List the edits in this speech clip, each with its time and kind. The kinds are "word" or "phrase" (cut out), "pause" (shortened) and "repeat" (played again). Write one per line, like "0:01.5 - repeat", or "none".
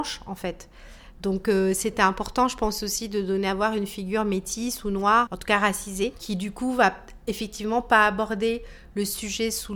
0:05.3 - word